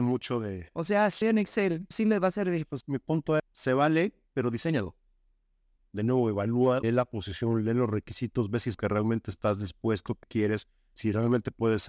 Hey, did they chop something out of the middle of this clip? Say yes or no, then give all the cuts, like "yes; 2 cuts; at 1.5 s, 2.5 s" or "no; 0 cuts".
yes; 7 cuts; at 1.2 s, 1.9 s, 2.8 s, 3.4 s, 6.8 s, 8.7 s, 10.2 s